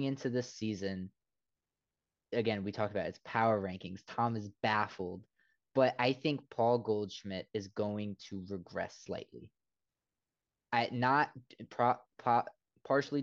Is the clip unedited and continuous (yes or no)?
yes